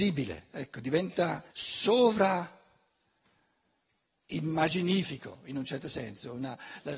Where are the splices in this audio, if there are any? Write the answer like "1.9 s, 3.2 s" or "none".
1.5 s